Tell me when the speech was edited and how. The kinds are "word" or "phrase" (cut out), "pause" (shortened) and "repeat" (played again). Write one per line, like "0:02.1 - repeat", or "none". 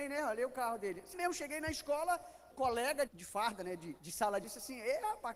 0:01.1 - word
0:02.5 - word
0:03.1 - word
0:04.0 - word
0:04.4 - word